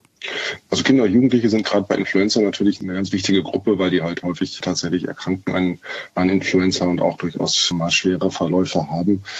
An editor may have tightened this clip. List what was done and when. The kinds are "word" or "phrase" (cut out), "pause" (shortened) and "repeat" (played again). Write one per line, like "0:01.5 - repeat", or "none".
none